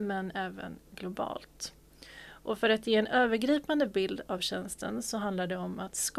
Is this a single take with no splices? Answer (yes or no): yes